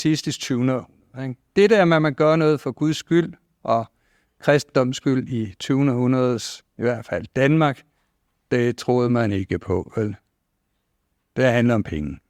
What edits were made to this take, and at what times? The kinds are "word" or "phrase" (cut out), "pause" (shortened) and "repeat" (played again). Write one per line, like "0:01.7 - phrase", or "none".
none